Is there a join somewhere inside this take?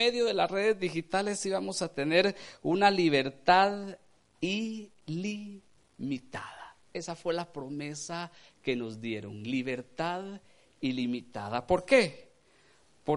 no; 0 cuts

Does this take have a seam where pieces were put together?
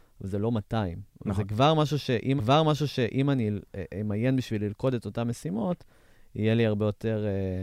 yes; 1 cut; at 2.4 s

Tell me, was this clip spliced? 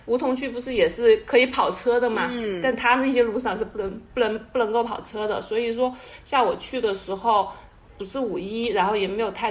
no; 0 cuts

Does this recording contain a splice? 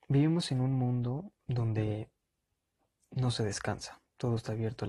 no; 0 cuts

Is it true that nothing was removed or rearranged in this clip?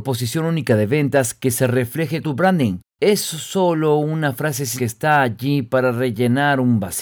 no; 3 cuts; at 2.2 s, 2.9 s, 4.8 s

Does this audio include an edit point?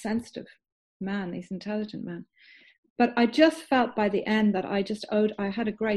no; 0 cuts

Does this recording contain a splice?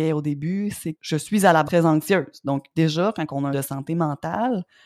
yes; 4 cuts; at 0.9 s, 1.6 s, 2.7 s, 3.5 s

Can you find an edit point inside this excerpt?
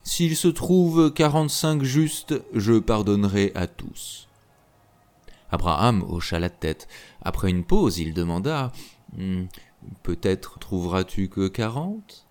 yes; 1 cut; at 10.6 s

